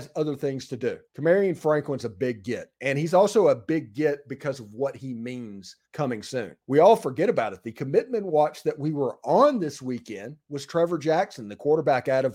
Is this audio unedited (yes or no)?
no